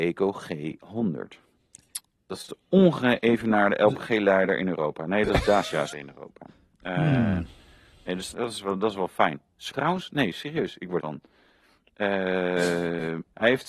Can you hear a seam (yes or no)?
yes